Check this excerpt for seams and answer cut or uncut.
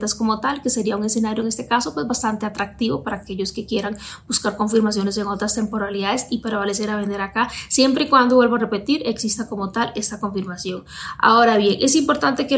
uncut